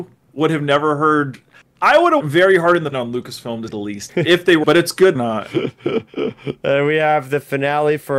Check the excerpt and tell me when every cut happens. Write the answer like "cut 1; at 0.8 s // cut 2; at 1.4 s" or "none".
cut 1; at 2.2 s // cut 2; at 2.9 s // cut 3; at 3.7 s // cut 4; at 4.1 s // cut 5; at 4.6 s // cut 6; at 5.1 s